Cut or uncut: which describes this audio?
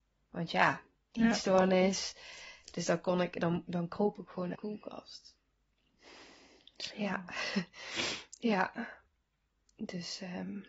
cut